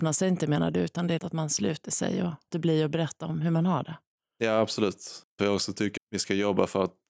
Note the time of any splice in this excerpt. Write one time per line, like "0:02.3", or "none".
0:01.2
0:02.5
0:05.4
0:06.0